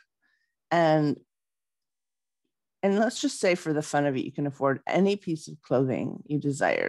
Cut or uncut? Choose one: uncut